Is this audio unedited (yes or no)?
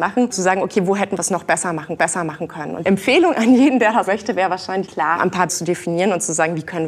no